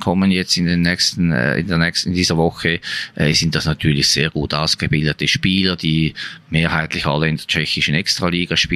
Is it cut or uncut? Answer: uncut